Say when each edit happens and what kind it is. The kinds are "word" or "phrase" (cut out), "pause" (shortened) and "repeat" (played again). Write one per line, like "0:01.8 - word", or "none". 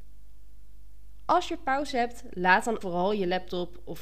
0:02.8 - word